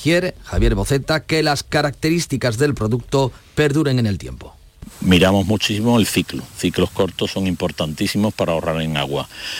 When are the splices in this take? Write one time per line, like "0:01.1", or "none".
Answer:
none